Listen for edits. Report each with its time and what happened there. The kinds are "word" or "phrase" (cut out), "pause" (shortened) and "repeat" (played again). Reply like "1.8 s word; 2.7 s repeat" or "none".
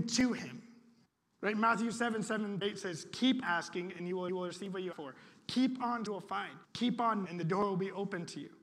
1.1 s pause; 2.6 s word; 3.4 s word; 4.3 s repeat; 4.9 s word; 6.1 s phrase; 6.6 s pause; 7.3 s word